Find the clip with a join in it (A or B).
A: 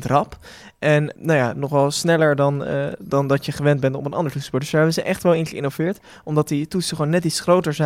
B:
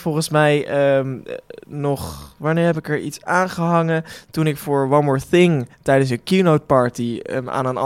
B